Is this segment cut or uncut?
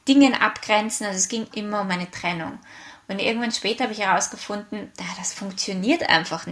cut